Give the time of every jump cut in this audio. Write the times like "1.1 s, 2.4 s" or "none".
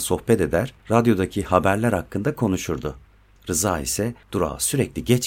none